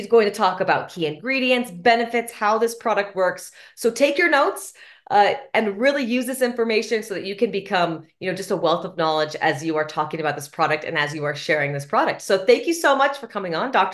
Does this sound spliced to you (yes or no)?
no